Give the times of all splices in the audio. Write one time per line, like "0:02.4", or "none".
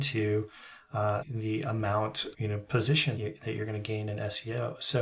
0:01.2
0:02.3
0:03.2

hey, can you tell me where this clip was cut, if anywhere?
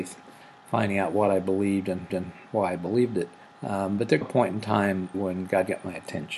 0:02.1
0:03.4
0:04.2
0:05.1

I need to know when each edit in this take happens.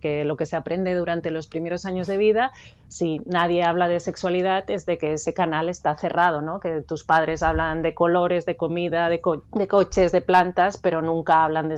0:09.5

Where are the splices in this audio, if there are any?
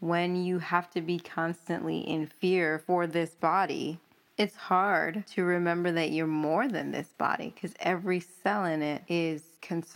none

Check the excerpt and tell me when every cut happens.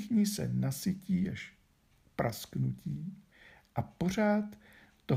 none

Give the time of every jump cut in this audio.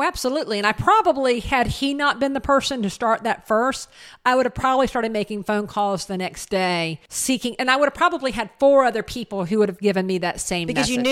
0:07.1

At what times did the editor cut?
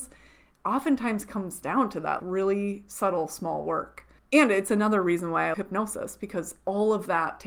0:02.2
0:04.2
0:05.5

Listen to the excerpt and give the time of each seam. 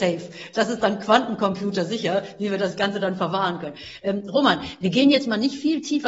none

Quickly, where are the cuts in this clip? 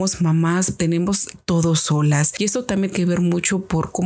0:01.4
0:02.9

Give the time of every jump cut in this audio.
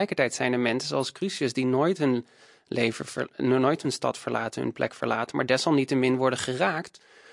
none

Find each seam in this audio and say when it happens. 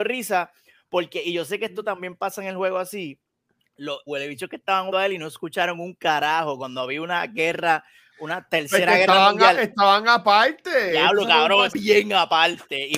0:04.1
0:04.9
0:11.7

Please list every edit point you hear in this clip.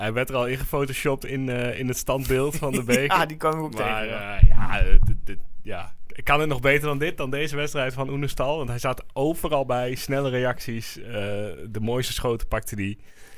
none

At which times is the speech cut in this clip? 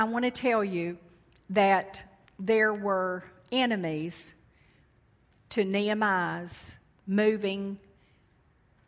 none

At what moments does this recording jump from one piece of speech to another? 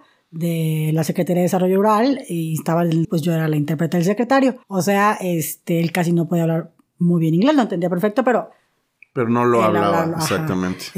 0:03.0
0:04.6

